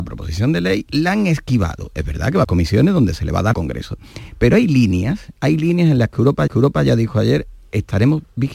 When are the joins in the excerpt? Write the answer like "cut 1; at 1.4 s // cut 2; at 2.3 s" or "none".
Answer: cut 1; at 2.4 s // cut 2; at 3.5 s // cut 3; at 6.5 s